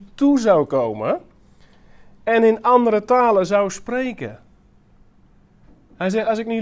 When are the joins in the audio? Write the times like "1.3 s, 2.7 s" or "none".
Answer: none